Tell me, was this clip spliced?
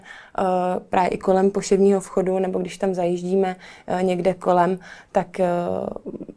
no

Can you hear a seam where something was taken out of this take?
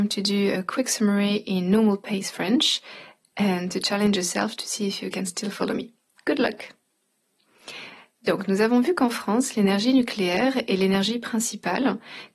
no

